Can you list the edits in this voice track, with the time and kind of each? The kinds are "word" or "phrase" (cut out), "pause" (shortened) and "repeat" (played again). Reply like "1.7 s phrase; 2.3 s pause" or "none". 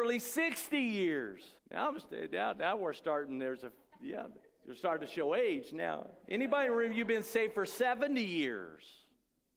1.6 s pause; 4.4 s pause